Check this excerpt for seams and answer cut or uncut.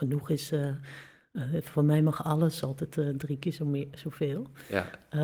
uncut